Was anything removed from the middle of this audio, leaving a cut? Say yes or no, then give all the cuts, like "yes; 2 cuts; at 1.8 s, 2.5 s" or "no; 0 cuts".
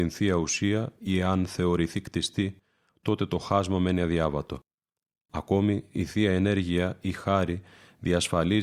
no; 0 cuts